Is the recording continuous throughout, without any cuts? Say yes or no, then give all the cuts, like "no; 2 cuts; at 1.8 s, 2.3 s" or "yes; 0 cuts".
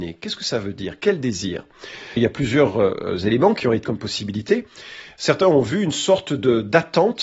no; 2 cuts; at 2.2 s, 3.8 s